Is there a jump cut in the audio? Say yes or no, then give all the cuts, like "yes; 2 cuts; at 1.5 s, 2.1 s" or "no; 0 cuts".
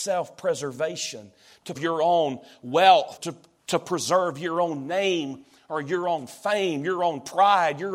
yes; 2 cuts; at 1.7 s, 3.2 s